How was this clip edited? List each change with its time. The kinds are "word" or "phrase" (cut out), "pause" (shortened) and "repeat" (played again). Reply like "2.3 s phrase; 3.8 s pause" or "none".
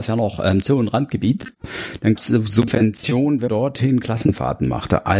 2.2 s word; 3.5 s word